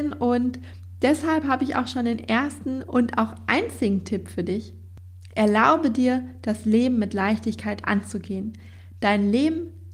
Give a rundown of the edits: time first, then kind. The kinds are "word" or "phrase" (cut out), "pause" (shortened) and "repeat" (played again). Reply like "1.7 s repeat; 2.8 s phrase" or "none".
none